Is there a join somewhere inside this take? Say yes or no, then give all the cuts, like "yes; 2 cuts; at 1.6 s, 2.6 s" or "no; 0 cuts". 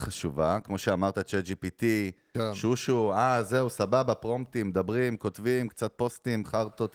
no; 0 cuts